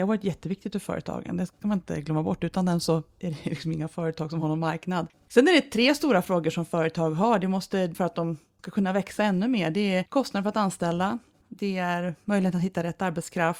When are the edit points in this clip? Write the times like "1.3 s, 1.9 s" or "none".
none

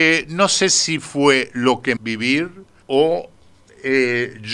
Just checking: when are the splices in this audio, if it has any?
2.0 s, 2.8 s

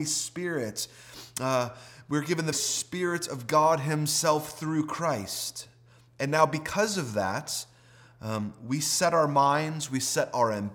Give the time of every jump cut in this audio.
2.5 s

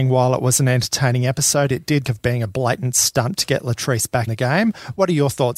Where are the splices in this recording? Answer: 2.0 s, 4.3 s

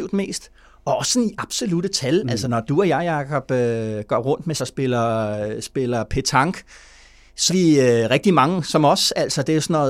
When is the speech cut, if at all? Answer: 2.4 s, 4.6 s, 7.5 s

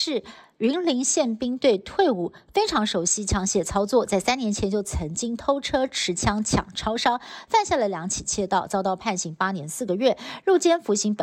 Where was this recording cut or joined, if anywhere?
none

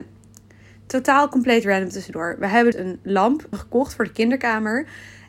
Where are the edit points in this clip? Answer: 2.7 s, 3.5 s

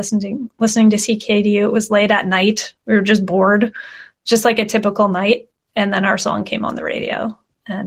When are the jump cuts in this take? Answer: none

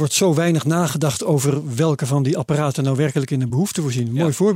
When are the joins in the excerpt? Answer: none

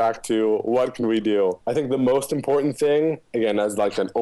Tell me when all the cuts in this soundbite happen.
none

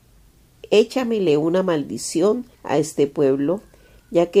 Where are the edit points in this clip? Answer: 2.5 s

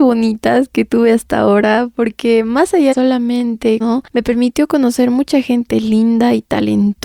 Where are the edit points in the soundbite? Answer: 2.9 s, 3.8 s

